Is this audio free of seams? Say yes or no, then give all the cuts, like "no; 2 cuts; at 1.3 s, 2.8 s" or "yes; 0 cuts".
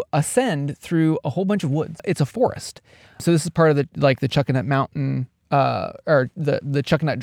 yes; 0 cuts